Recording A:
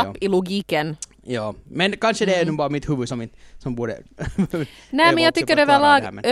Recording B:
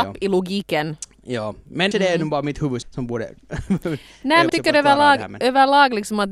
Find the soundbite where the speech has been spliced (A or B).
B